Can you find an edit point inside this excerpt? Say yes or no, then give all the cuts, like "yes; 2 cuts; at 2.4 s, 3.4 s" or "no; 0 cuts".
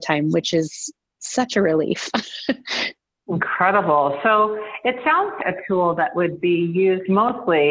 yes; 2 cuts; at 1.1 s, 5.4 s